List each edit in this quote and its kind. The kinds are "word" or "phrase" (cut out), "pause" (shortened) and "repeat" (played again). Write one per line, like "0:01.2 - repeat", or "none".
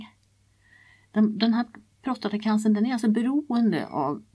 none